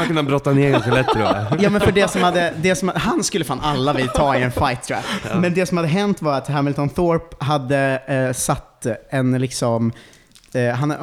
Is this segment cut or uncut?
uncut